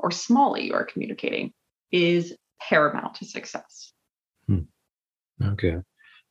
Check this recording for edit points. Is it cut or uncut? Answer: uncut